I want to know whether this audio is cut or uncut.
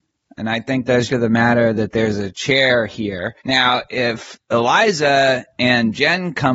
cut